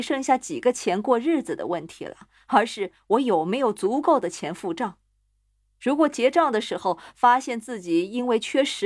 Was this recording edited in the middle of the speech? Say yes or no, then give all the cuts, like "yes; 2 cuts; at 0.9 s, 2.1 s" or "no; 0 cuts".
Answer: no; 0 cuts